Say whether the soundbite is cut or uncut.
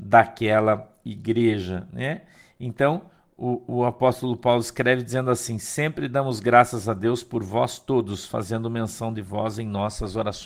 uncut